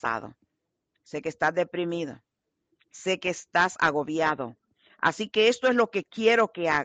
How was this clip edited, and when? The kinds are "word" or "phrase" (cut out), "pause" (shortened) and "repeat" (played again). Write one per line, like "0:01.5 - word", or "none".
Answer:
none